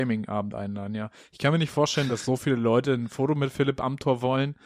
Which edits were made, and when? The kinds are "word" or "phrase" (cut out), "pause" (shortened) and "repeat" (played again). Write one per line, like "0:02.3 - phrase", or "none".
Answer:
none